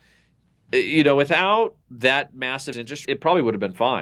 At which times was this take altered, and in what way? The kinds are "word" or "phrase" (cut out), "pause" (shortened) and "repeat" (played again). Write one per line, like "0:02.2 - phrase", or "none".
0:01.8 - pause
0:02.7 - word
0:03.0 - word